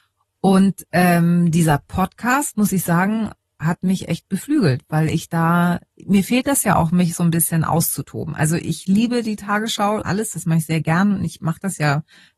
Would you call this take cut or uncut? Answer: cut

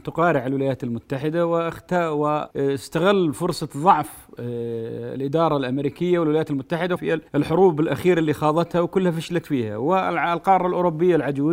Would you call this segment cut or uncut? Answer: cut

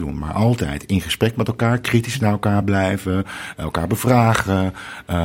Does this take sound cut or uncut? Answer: uncut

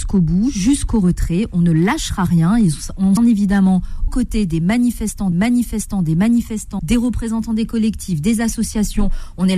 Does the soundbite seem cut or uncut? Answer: cut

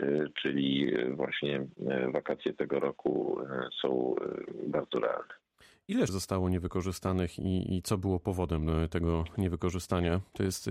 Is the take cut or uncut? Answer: cut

